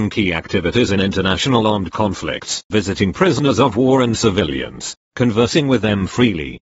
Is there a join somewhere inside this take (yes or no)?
yes